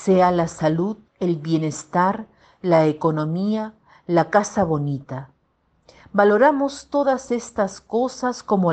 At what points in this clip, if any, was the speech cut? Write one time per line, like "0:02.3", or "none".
0:01.1